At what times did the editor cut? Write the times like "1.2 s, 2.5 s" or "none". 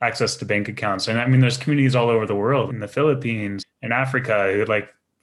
2.7 s, 3.6 s